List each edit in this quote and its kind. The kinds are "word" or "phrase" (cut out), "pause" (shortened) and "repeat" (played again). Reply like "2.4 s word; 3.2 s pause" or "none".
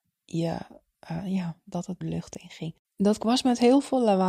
2.0 s phrase; 2.8 s pause